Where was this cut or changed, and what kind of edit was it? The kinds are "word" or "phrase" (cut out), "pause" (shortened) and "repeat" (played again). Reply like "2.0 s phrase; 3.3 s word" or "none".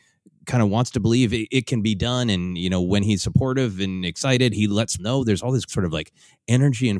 5.0 s word; 5.7 s word